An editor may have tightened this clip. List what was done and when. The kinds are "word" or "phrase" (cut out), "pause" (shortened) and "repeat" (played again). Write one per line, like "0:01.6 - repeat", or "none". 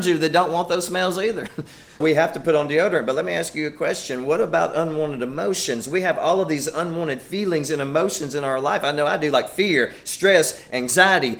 0:02.0 - word